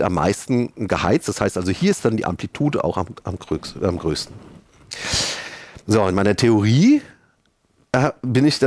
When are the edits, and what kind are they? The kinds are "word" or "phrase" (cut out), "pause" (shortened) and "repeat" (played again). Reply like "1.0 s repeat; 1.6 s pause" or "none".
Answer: 5.8 s pause